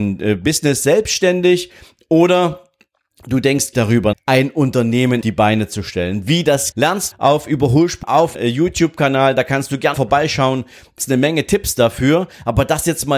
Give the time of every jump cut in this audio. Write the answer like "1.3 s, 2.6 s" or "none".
3.7 s, 4.1 s, 5.2 s, 6.7 s, 7.1 s, 8.0 s, 8.3 s, 9.9 s, 11.0 s